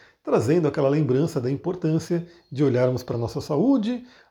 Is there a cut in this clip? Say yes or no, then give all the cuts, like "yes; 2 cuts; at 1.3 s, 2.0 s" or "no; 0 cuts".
no; 0 cuts